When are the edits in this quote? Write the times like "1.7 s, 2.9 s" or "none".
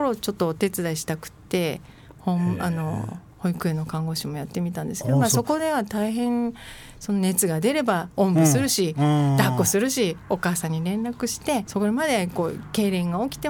11.7 s